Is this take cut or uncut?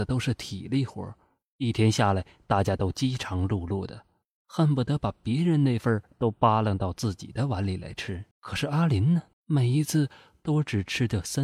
cut